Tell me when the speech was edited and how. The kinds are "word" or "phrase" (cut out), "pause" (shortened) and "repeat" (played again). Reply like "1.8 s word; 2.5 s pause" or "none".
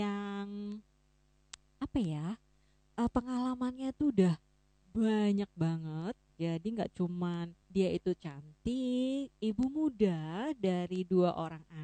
7.6 s pause